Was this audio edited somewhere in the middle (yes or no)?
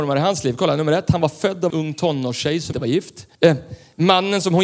yes